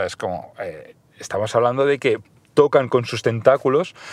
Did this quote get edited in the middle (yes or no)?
no